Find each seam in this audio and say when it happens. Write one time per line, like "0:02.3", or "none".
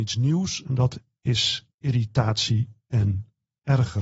0:01.7